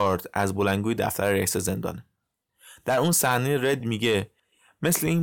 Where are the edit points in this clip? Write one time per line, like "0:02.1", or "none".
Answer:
none